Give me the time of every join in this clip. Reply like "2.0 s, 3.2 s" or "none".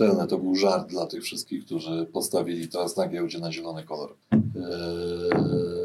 4.2 s